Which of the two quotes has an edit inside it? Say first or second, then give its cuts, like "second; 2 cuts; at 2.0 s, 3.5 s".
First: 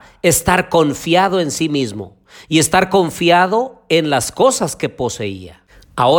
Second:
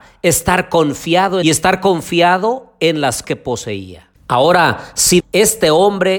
second; 4 cuts; at 1.4 s, 3.2 s, 4.2 s, 5.2 s